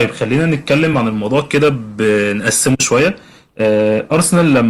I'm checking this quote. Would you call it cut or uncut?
uncut